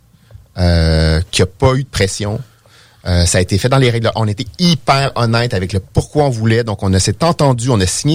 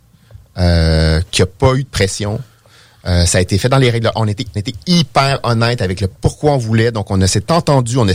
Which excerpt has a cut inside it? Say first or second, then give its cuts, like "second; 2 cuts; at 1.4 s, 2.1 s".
second; 1 cut; at 4.6 s